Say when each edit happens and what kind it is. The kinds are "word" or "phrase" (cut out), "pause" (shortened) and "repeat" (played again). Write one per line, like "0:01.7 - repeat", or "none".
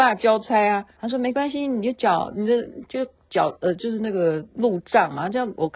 0:00.9 - pause
0:04.5 - pause